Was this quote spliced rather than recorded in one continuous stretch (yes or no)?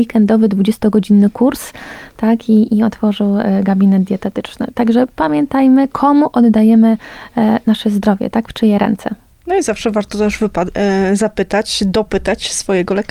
no